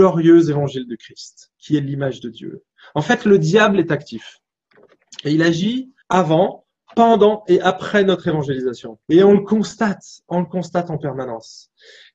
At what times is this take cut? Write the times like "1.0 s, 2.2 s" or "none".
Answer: 1.5 s, 2.7 s, 6.0 s, 9.0 s